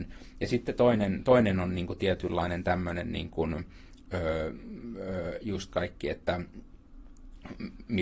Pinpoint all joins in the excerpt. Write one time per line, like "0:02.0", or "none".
0:05.7